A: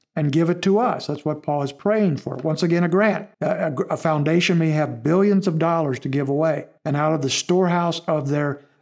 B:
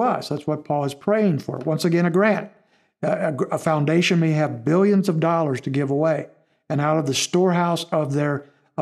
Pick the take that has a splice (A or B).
A